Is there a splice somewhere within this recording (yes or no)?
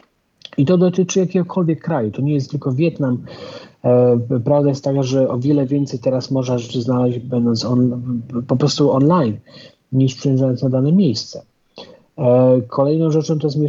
no